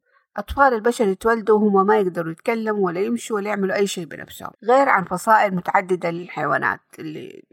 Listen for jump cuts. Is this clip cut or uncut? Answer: cut